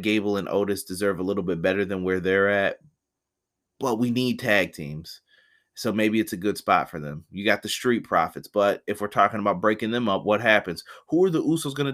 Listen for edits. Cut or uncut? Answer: uncut